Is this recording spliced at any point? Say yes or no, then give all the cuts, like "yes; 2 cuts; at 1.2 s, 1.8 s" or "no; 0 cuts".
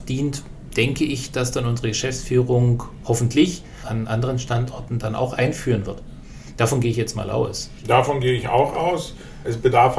no; 0 cuts